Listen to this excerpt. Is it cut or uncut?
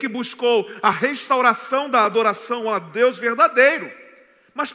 uncut